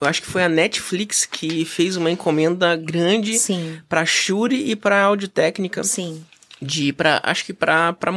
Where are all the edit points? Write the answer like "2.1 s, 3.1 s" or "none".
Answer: none